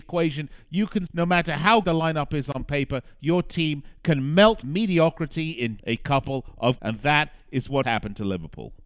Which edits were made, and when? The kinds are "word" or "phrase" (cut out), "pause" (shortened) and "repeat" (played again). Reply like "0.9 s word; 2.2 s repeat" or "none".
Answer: 1.1 s word; 1.8 s word; 4.6 s word; 5.8 s word; 6.8 s word; 7.8 s word